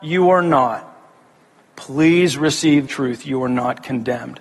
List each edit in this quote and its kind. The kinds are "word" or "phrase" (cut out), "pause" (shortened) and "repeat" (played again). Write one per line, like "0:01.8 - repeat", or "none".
0:02.9 - word